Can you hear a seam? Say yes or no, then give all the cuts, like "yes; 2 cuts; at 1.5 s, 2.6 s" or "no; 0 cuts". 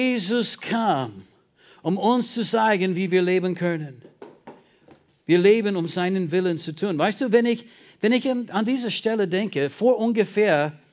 no; 0 cuts